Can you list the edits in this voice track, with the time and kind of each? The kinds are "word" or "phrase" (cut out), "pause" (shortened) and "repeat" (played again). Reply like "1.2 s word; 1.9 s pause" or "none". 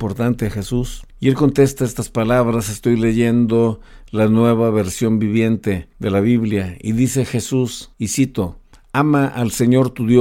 none